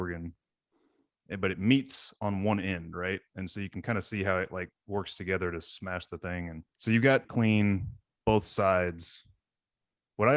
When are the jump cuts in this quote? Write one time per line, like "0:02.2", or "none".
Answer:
0:06.7
0:07.2